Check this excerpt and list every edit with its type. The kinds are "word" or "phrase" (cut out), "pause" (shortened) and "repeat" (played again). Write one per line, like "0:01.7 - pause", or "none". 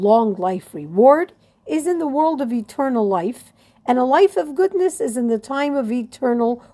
none